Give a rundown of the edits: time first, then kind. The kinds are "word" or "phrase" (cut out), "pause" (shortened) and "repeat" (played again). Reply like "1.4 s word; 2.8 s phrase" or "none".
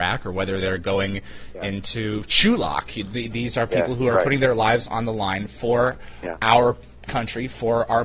none